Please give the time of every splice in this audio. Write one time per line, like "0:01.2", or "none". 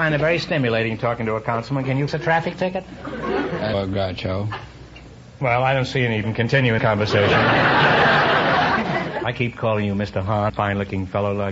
0:02.1
0:03.7
0:06.2
0:06.8
0:09.3
0:10.5